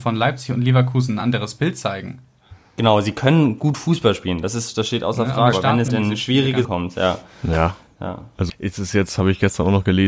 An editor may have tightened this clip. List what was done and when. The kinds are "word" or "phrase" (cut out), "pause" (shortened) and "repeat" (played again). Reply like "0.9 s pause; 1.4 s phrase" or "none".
5.5 s word; 5.9 s word; 6.6 s word; 8.5 s word